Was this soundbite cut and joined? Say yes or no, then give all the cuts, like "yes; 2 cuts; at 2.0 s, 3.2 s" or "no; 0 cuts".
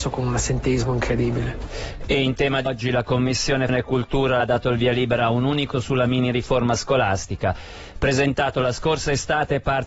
yes; 4 cuts; at 2.7 s, 3.7 s, 4.4 s, 5.7 s